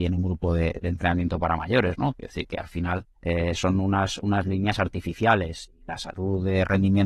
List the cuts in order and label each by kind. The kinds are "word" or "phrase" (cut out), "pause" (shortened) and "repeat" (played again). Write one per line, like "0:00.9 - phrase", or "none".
0:03.1 - pause
0:05.8 - pause

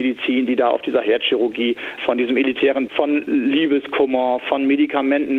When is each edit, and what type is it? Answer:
0:02.0 - word
0:02.9 - phrase
0:04.4 - word

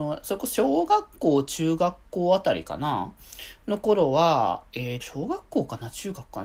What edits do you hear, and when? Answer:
0:05.0 - word

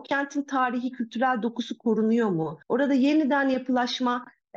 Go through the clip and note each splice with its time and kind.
0:02.6 - pause

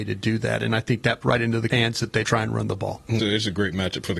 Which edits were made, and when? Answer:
0:01.2 - word
0:01.7 - word
0:02.2 - word
0:03.2 - word

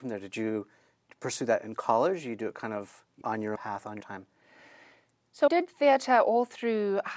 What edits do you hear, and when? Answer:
0:03.2 - word
0:03.6 - word
0:04.0 - word
0:05.5 - word

